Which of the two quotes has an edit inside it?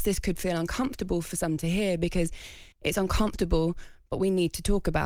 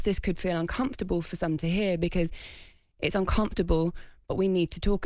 first; 1 cut; at 2.7 s

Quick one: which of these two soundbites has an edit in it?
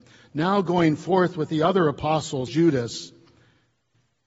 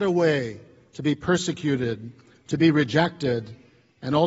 first; 1 cut; at 2.5 s

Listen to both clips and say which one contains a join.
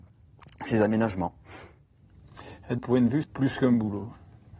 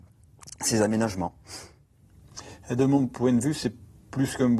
first; 2 cuts; at 2.8 s, 3.2 s

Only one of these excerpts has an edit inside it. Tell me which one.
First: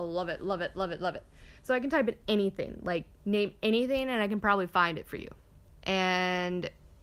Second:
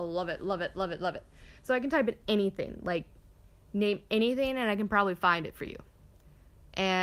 first; 2 cuts; at 3.1 s, 5.7 s

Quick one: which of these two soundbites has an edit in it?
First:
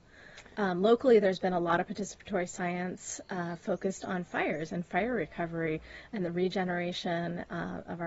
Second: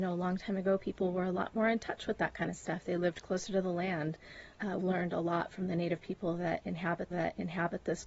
second; 2 cuts; at 4.8 s, 7.1 s

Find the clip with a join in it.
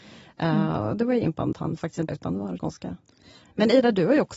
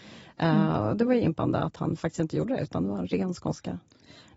first; 3 cuts; at 1.5 s, 2.1 s, 2.6 s

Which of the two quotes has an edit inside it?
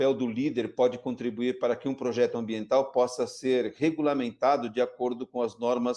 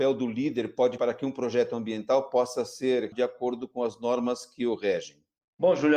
second; 2 cuts; at 1.0 s, 3.1 s

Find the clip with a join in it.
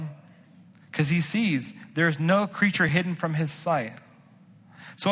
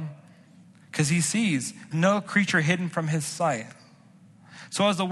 second; 1 cut; at 1.9 s

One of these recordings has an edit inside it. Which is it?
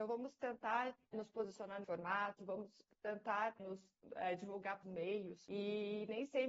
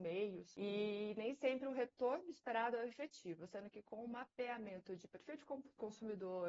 first; 4 cuts; at 1.1 s, 1.8 s, 3.6 s, 4.8 s

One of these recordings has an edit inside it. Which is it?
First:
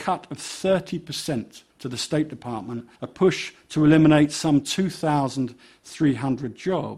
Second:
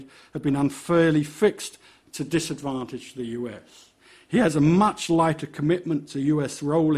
first; 2 cuts; at 1.7 s, 3.0 s

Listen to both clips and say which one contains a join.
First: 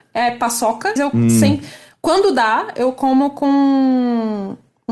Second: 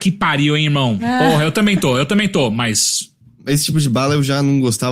first; 1 cut; at 1.0 s

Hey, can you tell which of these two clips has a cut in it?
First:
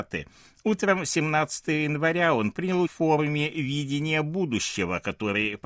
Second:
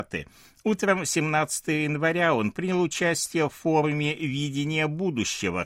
first; 1 cut; at 2.9 s

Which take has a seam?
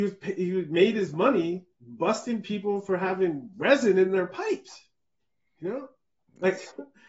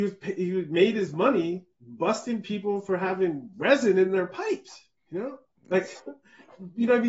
second; 2 cuts; at 5.0 s, 5.5 s

